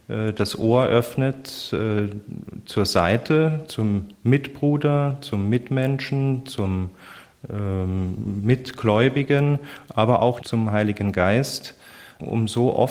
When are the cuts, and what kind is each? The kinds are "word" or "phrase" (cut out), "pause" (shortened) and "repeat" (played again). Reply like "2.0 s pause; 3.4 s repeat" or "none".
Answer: 4.1 s pause; 10.4 s phrase